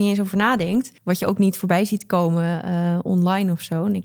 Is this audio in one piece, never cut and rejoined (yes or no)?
no